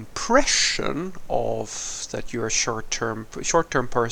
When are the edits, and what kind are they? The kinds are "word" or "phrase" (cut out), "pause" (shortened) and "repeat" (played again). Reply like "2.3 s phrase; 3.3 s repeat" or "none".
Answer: none